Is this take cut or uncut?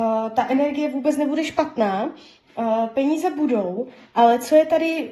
uncut